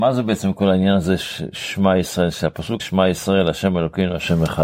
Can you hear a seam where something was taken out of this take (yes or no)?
yes